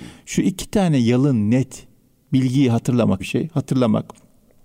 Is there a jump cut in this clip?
yes; 1 cut; at 3.2 s

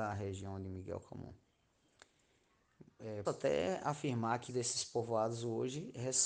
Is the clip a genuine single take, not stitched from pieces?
no; 2 cuts; at 3.2 s, 4.5 s

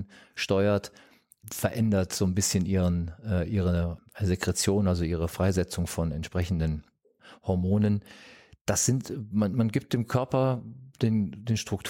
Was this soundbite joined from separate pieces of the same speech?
no; 0 cuts

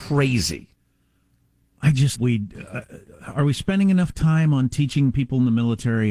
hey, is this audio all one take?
no; 1 cut; at 2.2 s

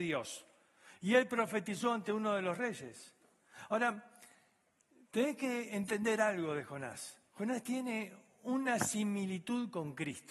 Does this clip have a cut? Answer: no; 0 cuts

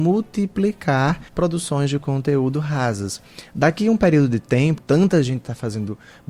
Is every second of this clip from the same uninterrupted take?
no; 2 cuts; at 1.3 s, 4.8 s

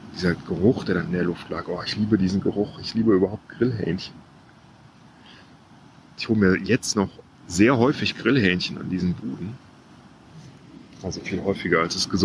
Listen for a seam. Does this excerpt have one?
no; 0 cuts

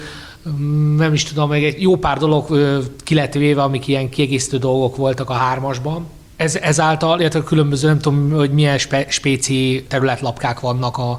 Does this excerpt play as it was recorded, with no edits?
yes; 0 cuts

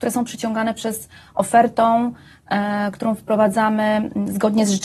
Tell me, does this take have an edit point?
no; 0 cuts

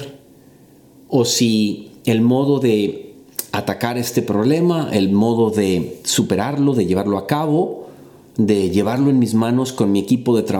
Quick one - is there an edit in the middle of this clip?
no; 0 cuts

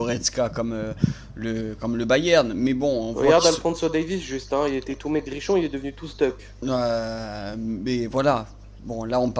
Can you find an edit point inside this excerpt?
no; 0 cuts

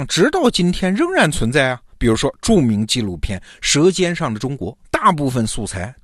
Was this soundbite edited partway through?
yes; 1 cut; at 4.8 s

